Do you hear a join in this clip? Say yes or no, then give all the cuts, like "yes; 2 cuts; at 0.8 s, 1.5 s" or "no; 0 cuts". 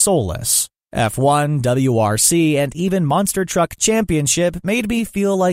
no; 0 cuts